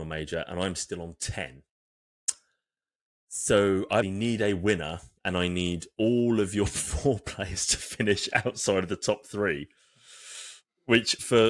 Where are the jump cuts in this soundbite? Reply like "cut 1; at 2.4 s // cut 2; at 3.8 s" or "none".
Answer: cut 1; at 4.0 s